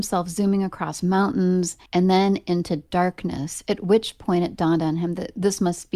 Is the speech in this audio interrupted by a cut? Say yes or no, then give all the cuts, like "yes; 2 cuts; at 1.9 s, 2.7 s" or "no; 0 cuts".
yes; 1 cut; at 1.9 s